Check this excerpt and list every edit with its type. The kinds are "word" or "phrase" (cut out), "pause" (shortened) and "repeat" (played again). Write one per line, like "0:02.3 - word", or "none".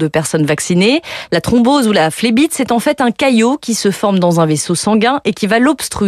none